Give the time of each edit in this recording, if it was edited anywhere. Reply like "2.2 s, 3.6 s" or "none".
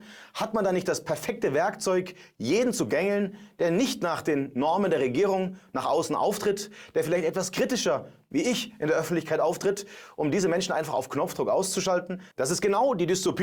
none

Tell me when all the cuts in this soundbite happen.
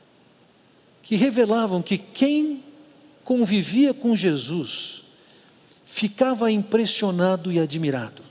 none

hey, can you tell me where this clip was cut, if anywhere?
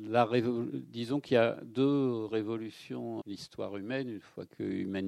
3.2 s

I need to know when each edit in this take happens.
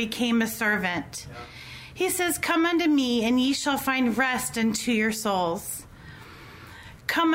none

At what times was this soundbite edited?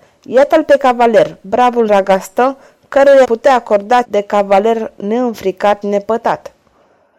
1.9 s, 3.2 s, 4.0 s, 5.8 s

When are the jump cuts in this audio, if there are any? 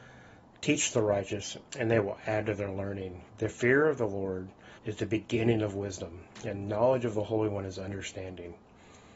1.7 s, 3.3 s, 4.8 s

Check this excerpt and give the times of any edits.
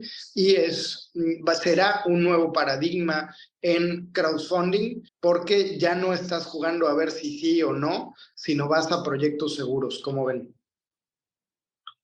5.1 s

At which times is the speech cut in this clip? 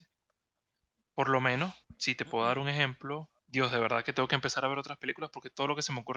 1.8 s, 3.4 s

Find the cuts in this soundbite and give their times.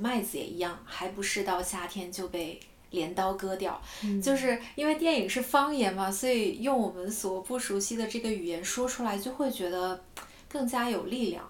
none

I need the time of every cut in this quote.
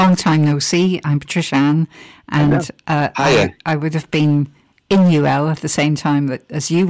none

